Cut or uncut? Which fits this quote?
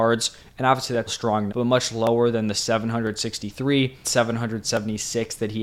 cut